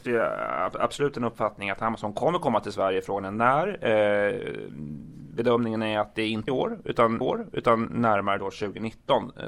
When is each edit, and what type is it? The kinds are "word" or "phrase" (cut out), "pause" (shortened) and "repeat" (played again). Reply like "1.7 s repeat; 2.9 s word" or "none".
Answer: 6.5 s word; 7.2 s repeat